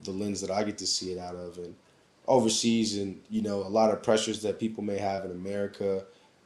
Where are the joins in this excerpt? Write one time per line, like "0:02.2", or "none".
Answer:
none